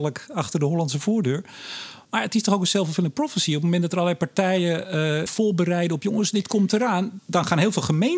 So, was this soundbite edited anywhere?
yes; 3 cuts; at 2.0 s, 5.3 s, 7.2 s

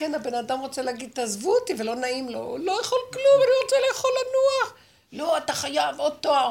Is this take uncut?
yes; 0 cuts

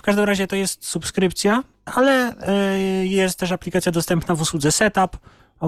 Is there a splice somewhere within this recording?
yes; 1 cut; at 1.7 s

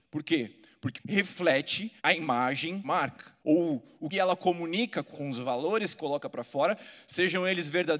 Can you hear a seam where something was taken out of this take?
yes; 7 cuts; at 0.9 s, 2.0 s, 2.8 s, 3.4 s, 4.1 s, 5.1 s, 6.0 s

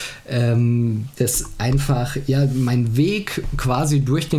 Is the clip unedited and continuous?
yes; 0 cuts

